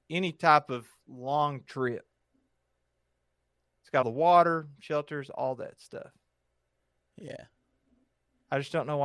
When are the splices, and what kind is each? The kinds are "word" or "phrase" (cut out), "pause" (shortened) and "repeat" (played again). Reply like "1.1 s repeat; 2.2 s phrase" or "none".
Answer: 4.0 s word